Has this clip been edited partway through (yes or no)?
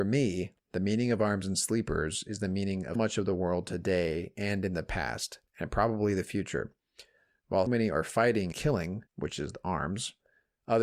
yes